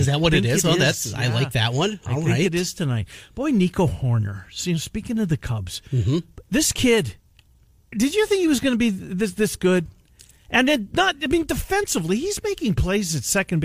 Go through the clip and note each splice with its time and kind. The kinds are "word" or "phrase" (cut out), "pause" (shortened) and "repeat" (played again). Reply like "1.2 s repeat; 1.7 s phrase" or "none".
none

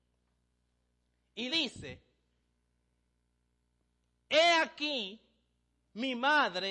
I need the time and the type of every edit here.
1.5 s word

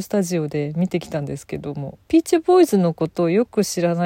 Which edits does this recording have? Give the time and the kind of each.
2.0 s pause

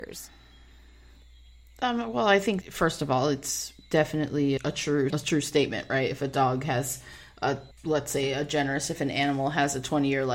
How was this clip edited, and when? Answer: 2.6 s word; 4.6 s word; 5.1 s word; 7.7 s pause

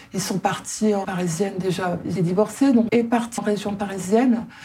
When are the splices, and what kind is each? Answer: 1.0 s word; 2.2 s word; 2.9 s word; 3.4 s word

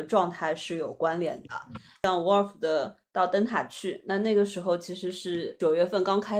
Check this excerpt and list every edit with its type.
none

